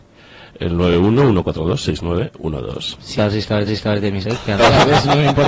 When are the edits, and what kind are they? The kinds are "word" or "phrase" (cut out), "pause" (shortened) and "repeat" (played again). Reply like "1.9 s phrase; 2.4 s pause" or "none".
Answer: 3.2 s phrase; 3.7 s repeat; 4.2 s word; 4.6 s word